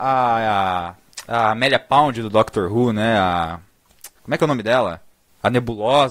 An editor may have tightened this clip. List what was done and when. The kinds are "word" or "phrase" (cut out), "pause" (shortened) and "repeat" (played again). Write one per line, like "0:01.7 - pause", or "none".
0:04.1 - pause